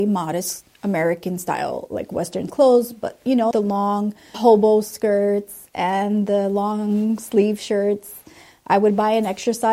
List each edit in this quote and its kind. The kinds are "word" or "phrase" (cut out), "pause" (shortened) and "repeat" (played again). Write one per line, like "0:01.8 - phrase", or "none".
0:02.5 - word
0:03.5 - word
0:04.3 - word